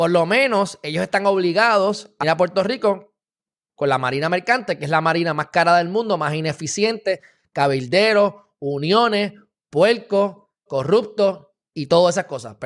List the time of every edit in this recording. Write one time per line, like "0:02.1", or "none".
0:02.2
0:10.7